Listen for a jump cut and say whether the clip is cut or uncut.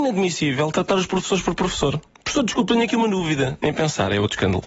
uncut